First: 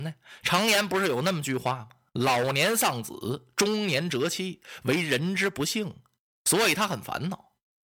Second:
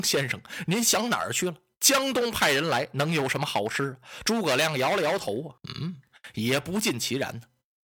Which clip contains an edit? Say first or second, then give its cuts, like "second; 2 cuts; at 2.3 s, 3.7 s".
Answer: second; 1 cut; at 5.6 s